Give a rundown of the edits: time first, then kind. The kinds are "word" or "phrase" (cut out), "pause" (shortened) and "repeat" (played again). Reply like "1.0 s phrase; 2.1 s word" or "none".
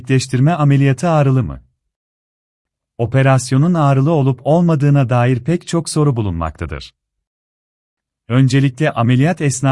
none